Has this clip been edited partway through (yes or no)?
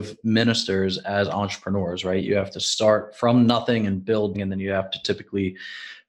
yes